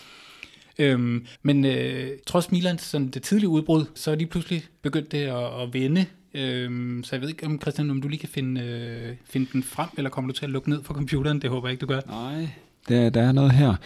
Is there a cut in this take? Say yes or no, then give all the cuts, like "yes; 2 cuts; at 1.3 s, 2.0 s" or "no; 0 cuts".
yes; 3 cuts; at 1.3 s, 2.2 s, 4.0 s